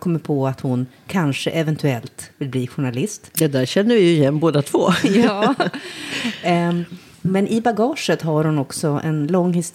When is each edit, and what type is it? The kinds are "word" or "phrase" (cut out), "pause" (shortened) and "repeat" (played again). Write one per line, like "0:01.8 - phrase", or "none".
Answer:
none